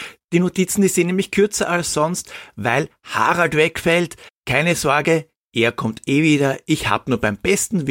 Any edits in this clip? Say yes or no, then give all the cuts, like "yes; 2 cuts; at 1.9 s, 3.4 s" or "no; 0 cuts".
yes; 1 cut; at 4.3 s